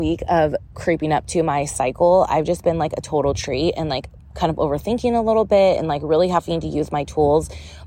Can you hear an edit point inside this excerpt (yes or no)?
no